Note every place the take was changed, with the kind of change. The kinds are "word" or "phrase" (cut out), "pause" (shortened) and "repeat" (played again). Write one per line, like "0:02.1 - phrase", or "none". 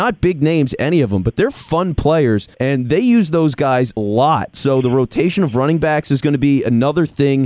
0:02.5 - pause
0:04.0 - word